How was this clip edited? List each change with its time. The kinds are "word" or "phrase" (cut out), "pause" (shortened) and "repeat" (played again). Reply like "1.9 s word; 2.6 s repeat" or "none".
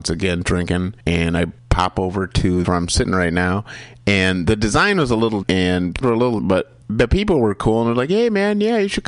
1.0 s pause; 1.6 s pause; 2.6 s phrase; 5.4 s word; 6.0 s word; 6.4 s word; 6.8 s pause

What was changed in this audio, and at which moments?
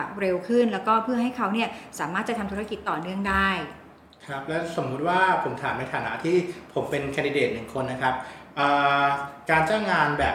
none

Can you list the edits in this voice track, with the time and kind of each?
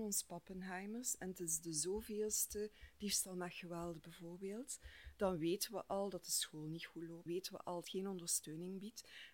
7.3 s word; 7.8 s phrase

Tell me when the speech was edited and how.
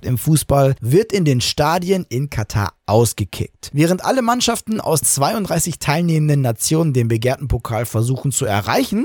5.0 s word

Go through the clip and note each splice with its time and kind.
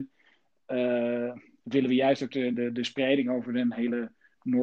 none

